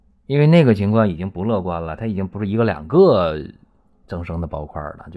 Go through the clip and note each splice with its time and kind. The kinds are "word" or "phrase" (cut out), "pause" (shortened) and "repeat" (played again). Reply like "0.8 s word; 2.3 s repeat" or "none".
none